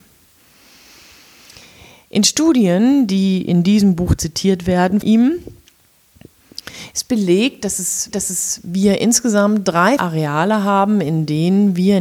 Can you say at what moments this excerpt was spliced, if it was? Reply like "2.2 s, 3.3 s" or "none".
5.0 s, 8.1 s, 10.0 s